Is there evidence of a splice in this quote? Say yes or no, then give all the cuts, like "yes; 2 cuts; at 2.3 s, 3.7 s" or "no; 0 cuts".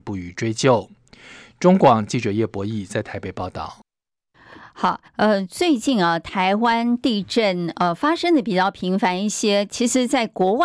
yes; 1 cut; at 5.1 s